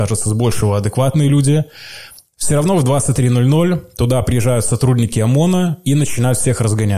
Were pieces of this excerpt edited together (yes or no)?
no